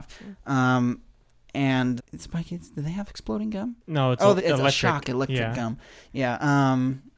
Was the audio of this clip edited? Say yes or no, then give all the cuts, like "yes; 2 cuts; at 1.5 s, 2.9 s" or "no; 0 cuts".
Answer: yes; 3 cuts; at 2.0 s, 3.8 s, 4.4 s